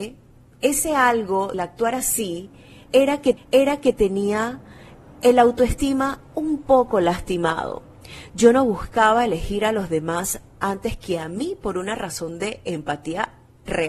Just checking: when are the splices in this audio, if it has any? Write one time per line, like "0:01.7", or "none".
0:01.5
0:03.4